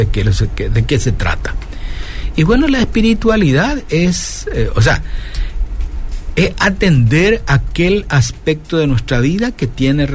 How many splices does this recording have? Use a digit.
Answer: 0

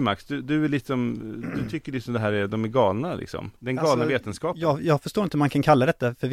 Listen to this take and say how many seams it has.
1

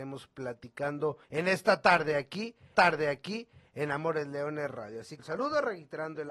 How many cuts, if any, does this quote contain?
3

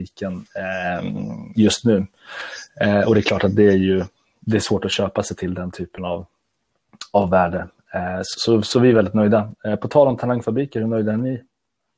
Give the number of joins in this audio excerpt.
0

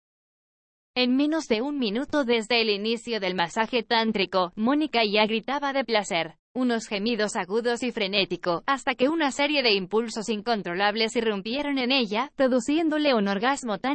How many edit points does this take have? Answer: 1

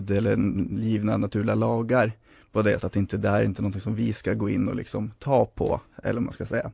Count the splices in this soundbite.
1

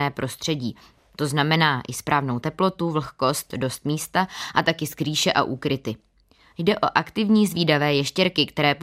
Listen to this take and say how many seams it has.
0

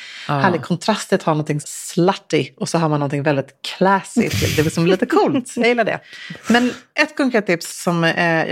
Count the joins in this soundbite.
1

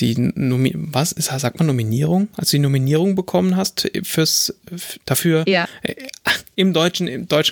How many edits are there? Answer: 1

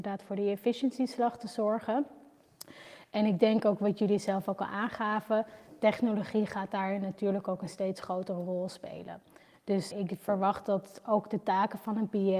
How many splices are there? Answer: 1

